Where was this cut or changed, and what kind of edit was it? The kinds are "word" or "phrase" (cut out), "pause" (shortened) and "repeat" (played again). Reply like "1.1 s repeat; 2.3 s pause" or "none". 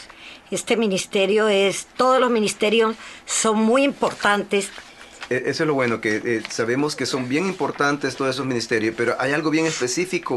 none